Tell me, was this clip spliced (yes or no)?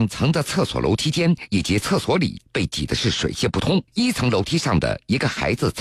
yes